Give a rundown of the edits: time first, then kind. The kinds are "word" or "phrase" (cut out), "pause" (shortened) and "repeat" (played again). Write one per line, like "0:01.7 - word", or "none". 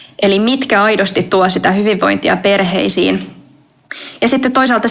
none